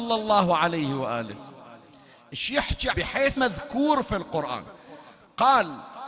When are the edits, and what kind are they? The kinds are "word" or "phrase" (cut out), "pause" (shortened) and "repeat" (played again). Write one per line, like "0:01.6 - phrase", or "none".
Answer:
0:02.9 - word
0:03.4 - word